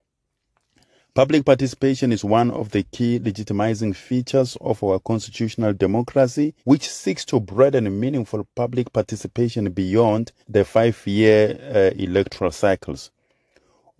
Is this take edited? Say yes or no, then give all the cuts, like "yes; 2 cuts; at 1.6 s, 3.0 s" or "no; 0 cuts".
yes; 2 cuts; at 6.6 s, 10.4 s